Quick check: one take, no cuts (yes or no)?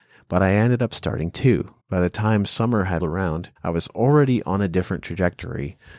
no